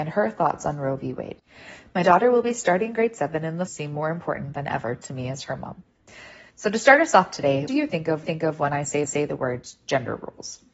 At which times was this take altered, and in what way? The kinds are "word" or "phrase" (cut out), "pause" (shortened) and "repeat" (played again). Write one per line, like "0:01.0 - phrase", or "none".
0:03.7 - phrase
0:06.5 - pause
0:07.7 - phrase
0:08.2 - repeat
0:09.0 - repeat